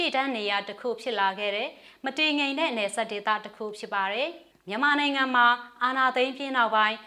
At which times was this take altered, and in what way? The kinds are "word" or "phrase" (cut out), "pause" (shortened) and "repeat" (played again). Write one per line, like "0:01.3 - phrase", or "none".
0:04.5 - pause